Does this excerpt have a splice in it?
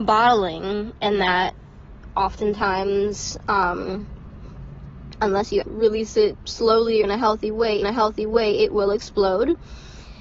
yes; 3 cuts; at 5.6 s, 7.0 s, 7.8 s

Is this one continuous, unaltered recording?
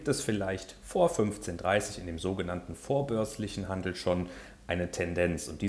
yes; 0 cuts

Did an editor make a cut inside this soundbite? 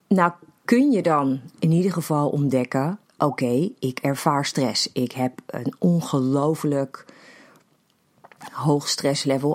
yes; 2 cuts; at 1.5 s, 3.0 s

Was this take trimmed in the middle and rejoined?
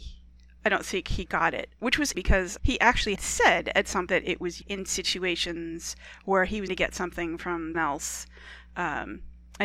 yes; 8 cuts; at 1.3 s, 2.1 s, 2.6 s, 3.2 s, 4.1 s, 4.6 s, 6.7 s, 7.7 s

